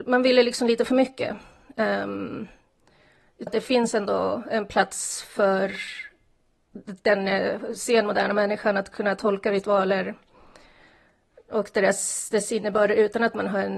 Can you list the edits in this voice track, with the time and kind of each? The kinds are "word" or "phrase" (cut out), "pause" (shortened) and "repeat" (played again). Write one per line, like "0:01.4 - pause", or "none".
0:03.5 - phrase